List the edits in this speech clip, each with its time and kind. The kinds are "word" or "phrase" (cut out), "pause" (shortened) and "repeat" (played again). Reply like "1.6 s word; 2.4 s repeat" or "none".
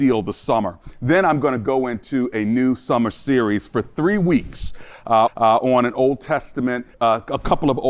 5.3 s repeat; 6.9 s pause